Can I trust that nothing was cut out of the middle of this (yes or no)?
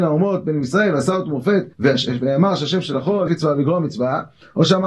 no